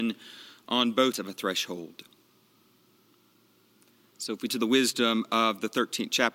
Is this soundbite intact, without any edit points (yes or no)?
no